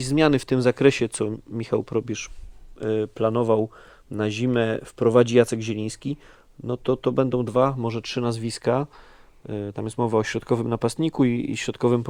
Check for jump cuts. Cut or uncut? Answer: uncut